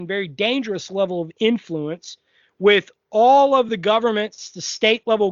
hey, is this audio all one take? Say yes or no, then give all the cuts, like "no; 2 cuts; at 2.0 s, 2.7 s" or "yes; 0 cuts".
yes; 0 cuts